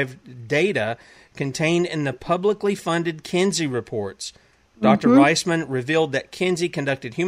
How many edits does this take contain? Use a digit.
0